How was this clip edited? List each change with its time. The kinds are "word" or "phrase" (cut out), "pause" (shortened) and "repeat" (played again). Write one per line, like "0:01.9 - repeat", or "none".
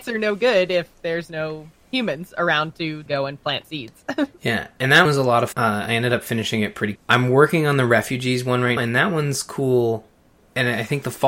0:03.1 - word
0:03.6 - word
0:05.1 - word
0:05.5 - word
0:07.0 - word
0:08.8 - word